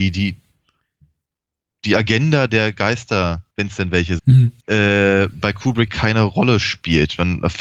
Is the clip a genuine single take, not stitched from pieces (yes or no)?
no